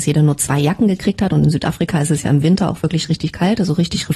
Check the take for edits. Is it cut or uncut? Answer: uncut